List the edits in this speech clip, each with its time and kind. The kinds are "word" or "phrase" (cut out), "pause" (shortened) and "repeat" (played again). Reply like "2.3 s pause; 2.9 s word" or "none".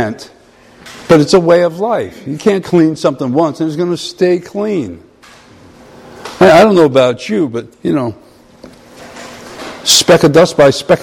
2.6 s word; 7.7 s pause